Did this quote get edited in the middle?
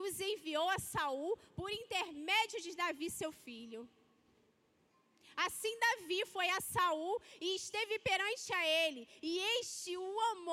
no; 0 cuts

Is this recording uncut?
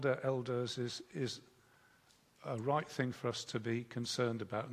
yes; 0 cuts

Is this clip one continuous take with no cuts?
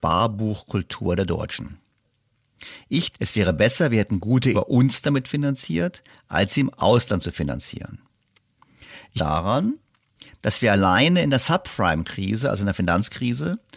no; 3 cuts; at 3.1 s, 4.5 s, 9.2 s

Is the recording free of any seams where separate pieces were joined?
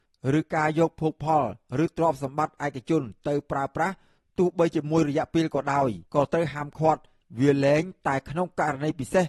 no; 1 cut; at 6.1 s

